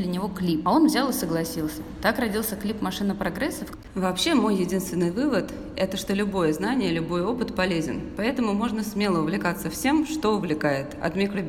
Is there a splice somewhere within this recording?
no; 0 cuts

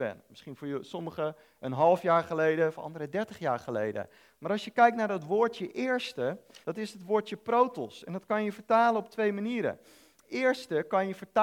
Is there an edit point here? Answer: yes; 1 cut; at 6.6 s

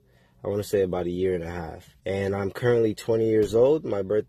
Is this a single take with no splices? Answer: no; 1 cut; at 2.0 s

